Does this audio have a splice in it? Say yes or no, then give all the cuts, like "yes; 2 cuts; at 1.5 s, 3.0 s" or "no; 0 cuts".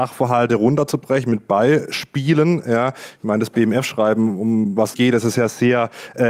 yes; 1 cut; at 4.9 s